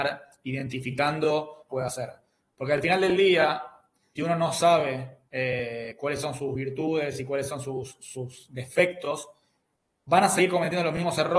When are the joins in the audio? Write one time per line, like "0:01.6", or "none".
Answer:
0:01.7
0:04.2
0:05.3